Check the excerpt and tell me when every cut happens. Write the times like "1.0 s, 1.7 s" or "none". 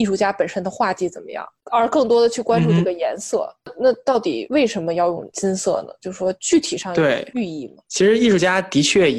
7.9 s